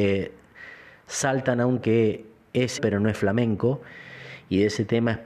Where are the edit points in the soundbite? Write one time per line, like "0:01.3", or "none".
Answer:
0:01.8
0:02.8